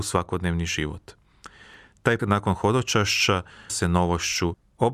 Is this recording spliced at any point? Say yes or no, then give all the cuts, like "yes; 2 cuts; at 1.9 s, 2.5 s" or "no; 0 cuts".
yes; 2 cuts; at 2.2 s, 3.7 s